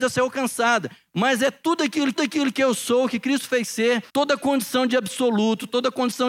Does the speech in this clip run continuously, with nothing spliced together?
no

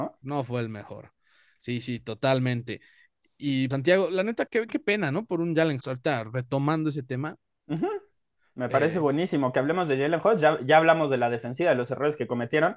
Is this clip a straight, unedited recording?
no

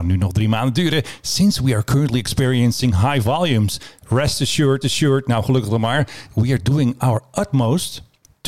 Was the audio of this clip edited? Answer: yes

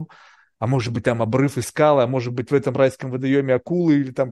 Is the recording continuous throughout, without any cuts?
yes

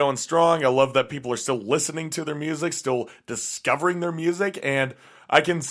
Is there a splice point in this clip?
no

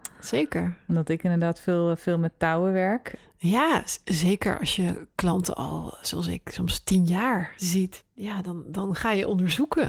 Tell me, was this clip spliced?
no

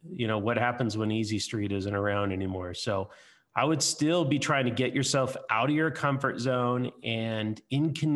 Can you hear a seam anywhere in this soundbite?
no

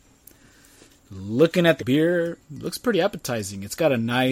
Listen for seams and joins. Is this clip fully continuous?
no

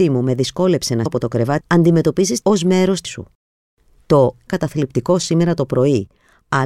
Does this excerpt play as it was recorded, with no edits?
no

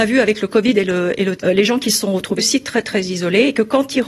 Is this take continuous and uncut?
no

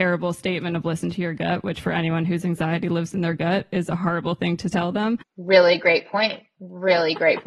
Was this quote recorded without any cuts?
yes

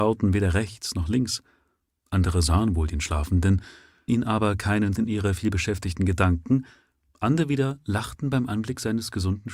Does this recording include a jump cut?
yes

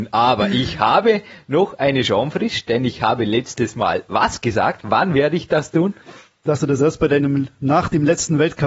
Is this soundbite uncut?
yes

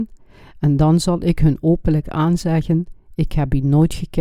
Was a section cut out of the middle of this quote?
no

